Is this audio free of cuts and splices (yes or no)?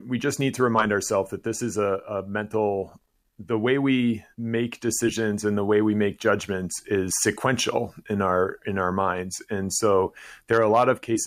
no